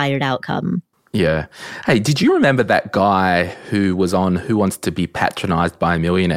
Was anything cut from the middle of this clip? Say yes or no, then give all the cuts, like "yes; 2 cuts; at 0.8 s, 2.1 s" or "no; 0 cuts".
yes; 1 cut; at 0.9 s